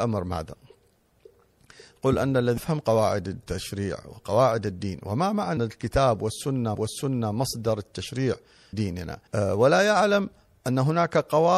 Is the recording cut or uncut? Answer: cut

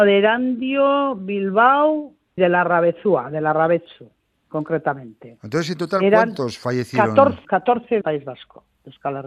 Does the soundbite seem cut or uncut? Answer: cut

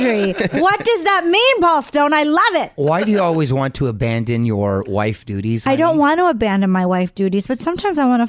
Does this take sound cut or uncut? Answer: uncut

